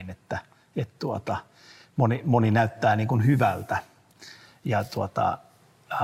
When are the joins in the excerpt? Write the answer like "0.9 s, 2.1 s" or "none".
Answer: none